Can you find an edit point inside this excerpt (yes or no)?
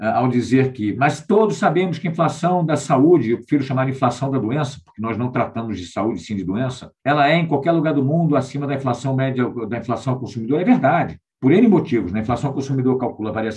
no